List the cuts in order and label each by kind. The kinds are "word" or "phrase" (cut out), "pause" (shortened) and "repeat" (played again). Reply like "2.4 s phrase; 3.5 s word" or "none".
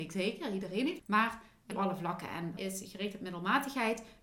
1.0 s word; 1.7 s word; 2.6 s word